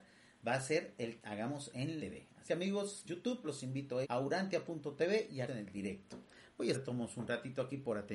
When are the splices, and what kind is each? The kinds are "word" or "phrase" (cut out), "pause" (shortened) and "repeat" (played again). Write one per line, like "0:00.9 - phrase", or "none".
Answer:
0:01.2 - word
0:02.0 - word
0:02.5 - word
0:03.0 - word
0:03.4 - word
0:04.0 - word
0:05.5 - word
0:06.7 - word